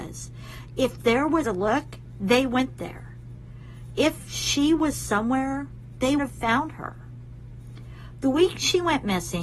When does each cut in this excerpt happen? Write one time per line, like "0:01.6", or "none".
0:01.4
0:06.2